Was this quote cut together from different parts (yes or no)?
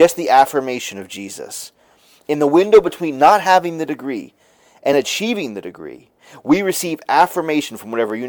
no